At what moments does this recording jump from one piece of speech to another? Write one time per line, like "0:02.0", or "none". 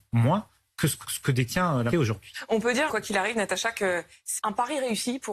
0:01.0
0:01.9
0:02.9
0:04.4